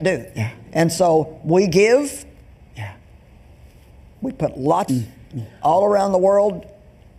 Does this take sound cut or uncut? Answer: cut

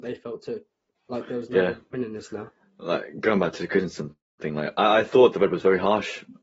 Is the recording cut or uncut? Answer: uncut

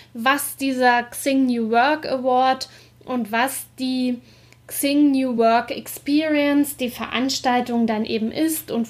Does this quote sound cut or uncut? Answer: uncut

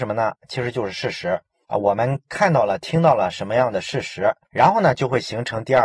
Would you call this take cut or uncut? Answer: uncut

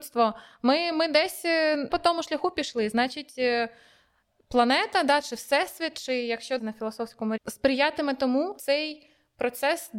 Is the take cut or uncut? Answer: cut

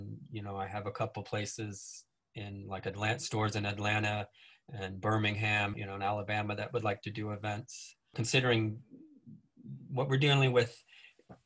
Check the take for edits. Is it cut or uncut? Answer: cut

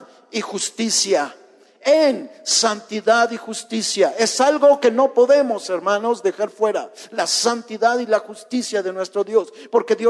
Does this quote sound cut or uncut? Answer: uncut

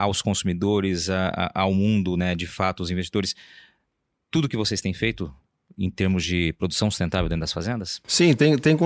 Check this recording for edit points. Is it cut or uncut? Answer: uncut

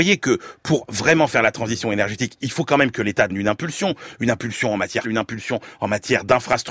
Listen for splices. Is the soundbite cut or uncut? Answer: cut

